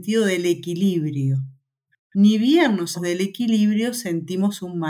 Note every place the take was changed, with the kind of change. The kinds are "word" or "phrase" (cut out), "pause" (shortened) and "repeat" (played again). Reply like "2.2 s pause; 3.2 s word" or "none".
2.9 s word